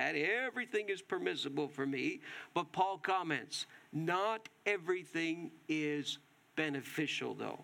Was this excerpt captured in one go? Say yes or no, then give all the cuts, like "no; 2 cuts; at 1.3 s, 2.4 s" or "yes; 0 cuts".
yes; 0 cuts